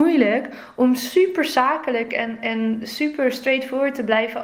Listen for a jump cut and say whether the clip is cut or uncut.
uncut